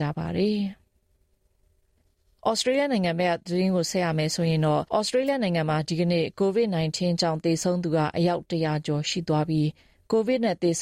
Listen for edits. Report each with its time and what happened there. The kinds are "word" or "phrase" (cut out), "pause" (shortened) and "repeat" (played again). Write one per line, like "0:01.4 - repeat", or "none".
0:04.9 - pause

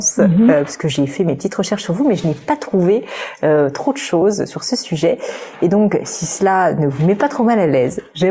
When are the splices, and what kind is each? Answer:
none

